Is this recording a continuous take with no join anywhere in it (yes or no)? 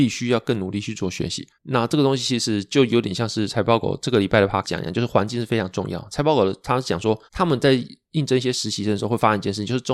no